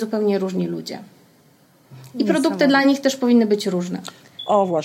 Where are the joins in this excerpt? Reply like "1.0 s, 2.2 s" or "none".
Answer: none